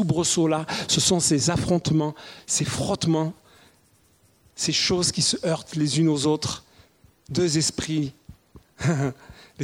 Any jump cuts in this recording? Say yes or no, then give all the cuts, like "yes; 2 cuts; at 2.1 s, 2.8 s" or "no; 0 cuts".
no; 0 cuts